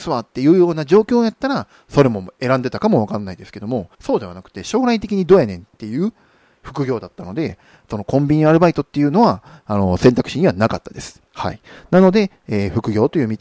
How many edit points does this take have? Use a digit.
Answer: 2